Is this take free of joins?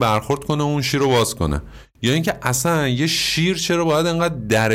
yes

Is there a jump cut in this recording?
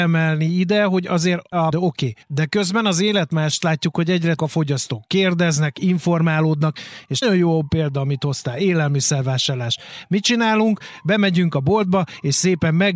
yes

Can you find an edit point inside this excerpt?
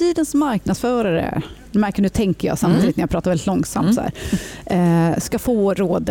no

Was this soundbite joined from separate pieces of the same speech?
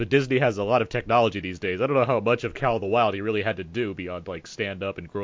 no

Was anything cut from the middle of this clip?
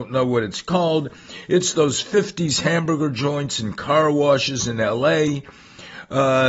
no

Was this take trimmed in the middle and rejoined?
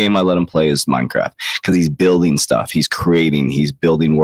no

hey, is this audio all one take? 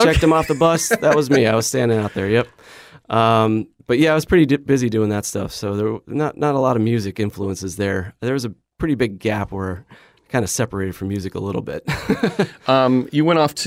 yes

